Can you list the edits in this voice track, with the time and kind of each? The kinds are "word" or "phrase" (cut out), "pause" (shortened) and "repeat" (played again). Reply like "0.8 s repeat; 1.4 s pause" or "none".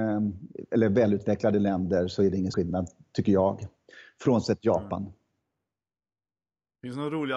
2.5 s word